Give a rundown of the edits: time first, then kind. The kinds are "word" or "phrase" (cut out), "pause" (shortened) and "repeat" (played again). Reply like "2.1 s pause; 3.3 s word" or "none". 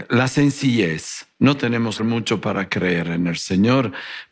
2.0 s word